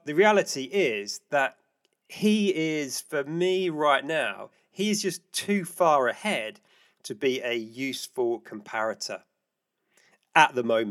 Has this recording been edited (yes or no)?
no